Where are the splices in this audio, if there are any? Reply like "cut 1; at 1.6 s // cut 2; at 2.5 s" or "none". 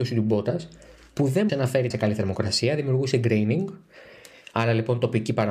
cut 1; at 1.5 s // cut 2; at 1.9 s